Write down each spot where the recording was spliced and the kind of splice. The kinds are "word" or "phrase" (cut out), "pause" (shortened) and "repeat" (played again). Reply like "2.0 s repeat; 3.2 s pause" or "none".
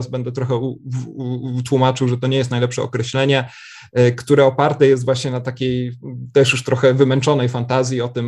none